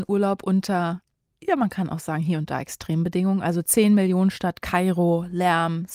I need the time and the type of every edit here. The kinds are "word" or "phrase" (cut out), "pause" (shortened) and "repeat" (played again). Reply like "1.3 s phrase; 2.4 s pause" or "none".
none